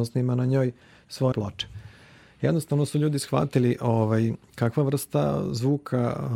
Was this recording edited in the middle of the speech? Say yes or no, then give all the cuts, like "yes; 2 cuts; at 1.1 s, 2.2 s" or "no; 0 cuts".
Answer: yes; 2 cuts; at 1.3 s, 4.4 s